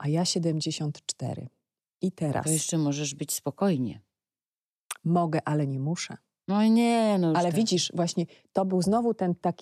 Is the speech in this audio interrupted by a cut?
no; 0 cuts

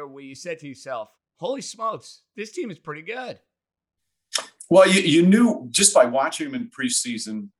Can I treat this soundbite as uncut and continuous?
no; 1 cut; at 1.2 s

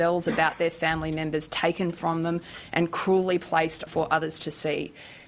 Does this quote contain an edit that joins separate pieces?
yes; 1 cut; at 3.9 s

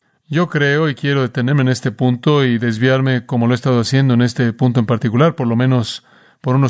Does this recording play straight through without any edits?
yes; 0 cuts

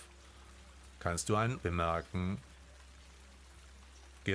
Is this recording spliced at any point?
yes; 1 cut; at 1.6 s

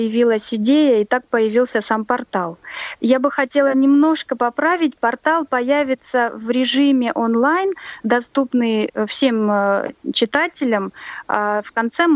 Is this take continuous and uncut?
yes; 0 cuts

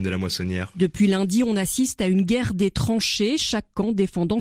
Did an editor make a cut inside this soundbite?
no; 0 cuts

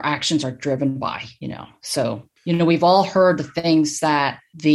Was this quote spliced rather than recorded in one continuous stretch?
yes; 1 cut; at 2.4 s

